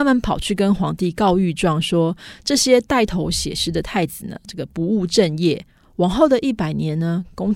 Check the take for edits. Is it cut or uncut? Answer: uncut